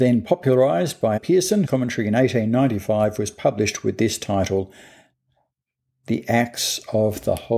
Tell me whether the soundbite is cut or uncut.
cut